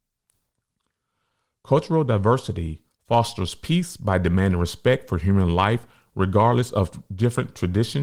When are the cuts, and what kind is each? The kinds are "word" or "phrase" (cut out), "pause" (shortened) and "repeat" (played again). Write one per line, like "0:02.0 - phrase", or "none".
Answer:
none